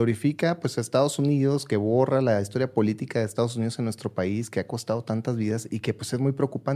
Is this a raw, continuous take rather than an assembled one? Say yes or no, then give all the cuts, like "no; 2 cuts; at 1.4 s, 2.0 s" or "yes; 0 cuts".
yes; 0 cuts